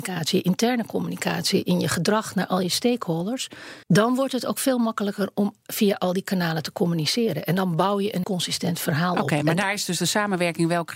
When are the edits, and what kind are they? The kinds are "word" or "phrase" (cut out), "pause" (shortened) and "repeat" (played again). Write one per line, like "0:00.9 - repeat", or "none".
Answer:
0:03.8 - pause
0:08.2 - word